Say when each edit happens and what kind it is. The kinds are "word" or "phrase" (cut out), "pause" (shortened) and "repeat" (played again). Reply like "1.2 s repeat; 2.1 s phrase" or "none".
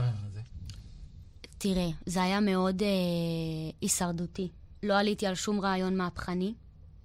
none